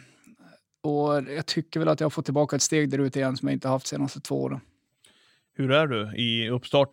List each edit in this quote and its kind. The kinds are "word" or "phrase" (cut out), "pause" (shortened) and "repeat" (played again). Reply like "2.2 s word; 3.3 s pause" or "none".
none